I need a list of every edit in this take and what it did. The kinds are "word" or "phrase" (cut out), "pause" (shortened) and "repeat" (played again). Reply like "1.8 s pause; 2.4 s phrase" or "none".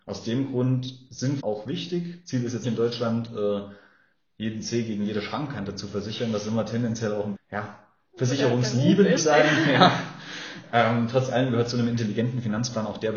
1.4 s word; 2.6 s word; 7.3 s word; 9.2 s word